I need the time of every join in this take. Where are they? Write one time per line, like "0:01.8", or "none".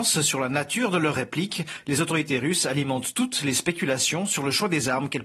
none